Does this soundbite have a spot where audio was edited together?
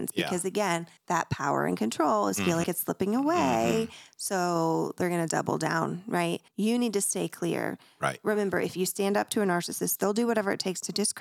yes; 3 cuts; at 1.0 s, 2.6 s, 6.5 s

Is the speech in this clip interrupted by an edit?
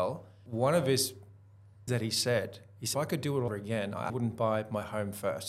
yes; 4 cuts; at 1.9 s, 2.9 s, 3.5 s, 4.1 s

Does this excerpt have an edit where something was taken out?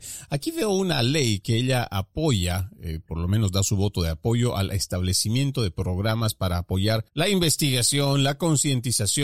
yes; 1 cut; at 7.1 s

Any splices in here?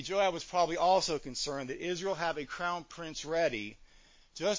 no; 0 cuts

